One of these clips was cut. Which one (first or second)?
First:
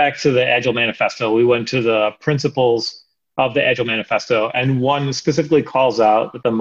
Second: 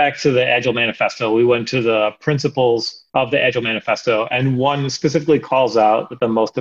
second